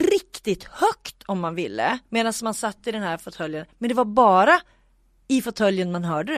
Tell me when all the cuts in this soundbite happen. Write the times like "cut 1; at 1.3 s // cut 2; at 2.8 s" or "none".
cut 1; at 2.1 s